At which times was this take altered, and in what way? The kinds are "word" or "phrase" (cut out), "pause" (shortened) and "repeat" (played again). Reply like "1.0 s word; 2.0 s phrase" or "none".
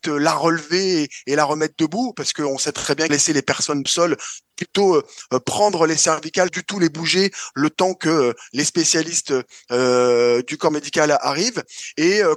3.1 s phrase; 3.9 s phrase; 6.5 s word